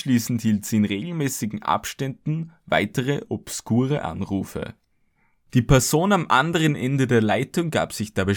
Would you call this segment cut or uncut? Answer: uncut